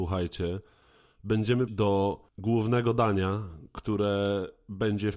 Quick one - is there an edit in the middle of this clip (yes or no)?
yes